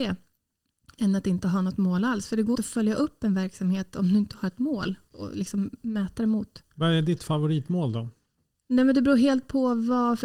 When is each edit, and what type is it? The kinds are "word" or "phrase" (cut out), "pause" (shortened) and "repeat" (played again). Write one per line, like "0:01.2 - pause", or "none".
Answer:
0:02.5 - word